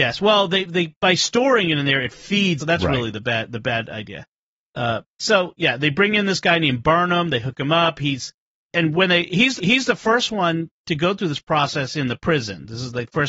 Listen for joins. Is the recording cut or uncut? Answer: cut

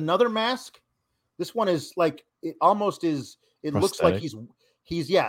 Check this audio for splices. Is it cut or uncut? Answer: uncut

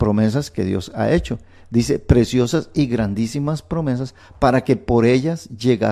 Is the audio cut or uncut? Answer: uncut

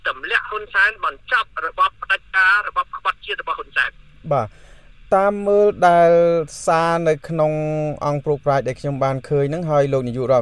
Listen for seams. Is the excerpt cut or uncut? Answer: uncut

